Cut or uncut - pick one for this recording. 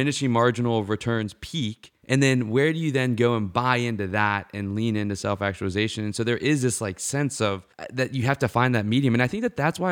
cut